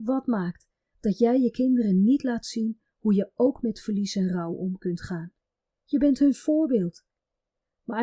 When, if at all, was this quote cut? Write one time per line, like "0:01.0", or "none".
none